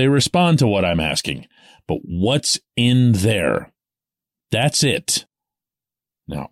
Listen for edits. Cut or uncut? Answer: uncut